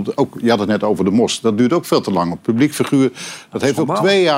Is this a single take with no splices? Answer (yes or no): yes